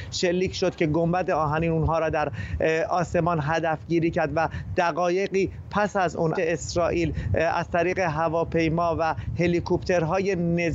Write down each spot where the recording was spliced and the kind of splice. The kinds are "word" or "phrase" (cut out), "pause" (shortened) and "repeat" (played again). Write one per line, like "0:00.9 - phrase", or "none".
0:06.3 - word